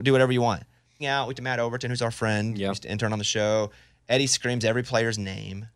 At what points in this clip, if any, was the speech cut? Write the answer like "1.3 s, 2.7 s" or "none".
1.0 s, 1.3 s